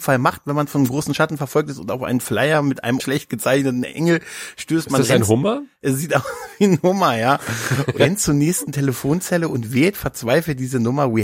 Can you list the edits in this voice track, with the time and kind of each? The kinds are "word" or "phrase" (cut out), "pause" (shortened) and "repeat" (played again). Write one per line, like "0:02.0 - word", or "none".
0:03.0 - phrase
0:08.0 - word

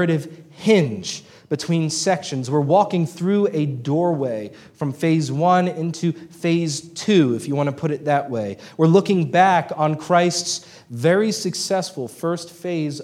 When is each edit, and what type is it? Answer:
none

